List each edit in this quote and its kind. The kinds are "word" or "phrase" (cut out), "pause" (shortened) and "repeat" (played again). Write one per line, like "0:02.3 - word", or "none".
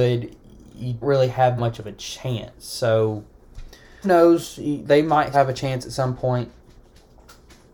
0:01.0 - word
0:01.6 - word
0:04.0 - word
0:05.3 - word

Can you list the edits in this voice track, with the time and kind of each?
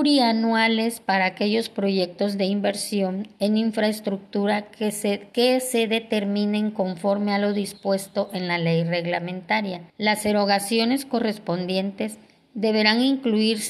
0:09.9 - pause

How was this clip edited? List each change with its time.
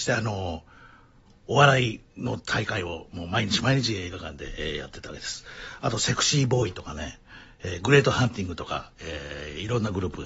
0:02.1 - pause

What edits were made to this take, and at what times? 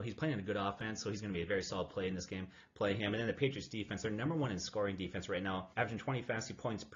0:05.7 - pause

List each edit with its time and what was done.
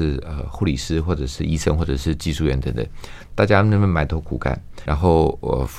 0:04.9 - word

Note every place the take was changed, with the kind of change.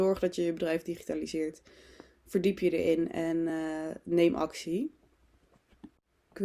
none

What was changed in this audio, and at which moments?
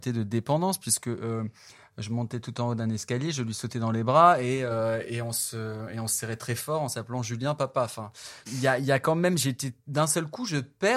0:08.5 - word

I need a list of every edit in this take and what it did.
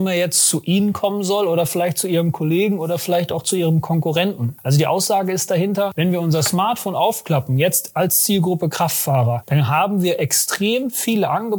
none

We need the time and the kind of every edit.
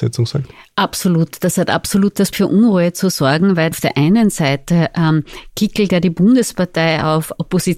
0:02.3 - word
0:03.7 - phrase

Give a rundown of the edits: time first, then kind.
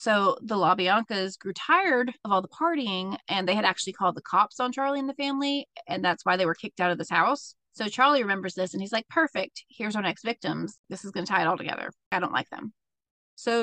0:02.2 - pause
0:07.6 - pause

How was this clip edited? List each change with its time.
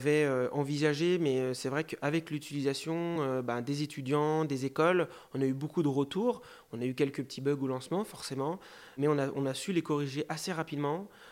none

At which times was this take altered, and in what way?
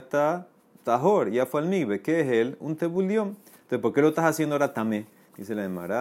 none

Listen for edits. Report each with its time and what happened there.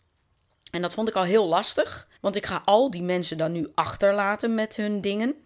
0:02.2 - pause

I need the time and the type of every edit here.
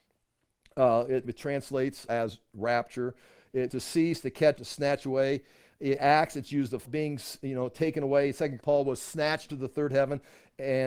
0:01.2 - word
0:02.1 - word
0:03.7 - word
0:04.6 - word
0:06.0 - word
0:06.8 - word
0:08.6 - word
0:09.5 - word

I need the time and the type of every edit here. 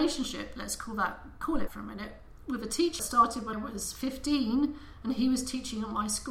0:01.7 - word
0:03.0 - word
0:03.5 - word

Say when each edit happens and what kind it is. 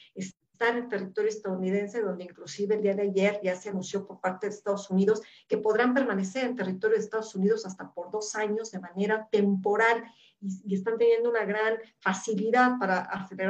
none

